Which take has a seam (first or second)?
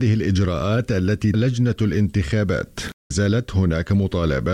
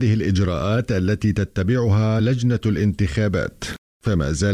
first